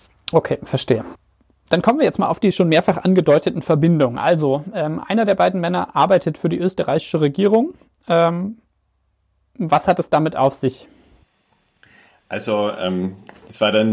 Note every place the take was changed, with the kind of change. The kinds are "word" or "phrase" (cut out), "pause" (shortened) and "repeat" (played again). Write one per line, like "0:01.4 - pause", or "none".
none